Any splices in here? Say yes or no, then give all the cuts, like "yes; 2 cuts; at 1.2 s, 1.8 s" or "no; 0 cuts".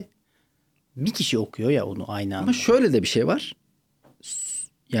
no; 0 cuts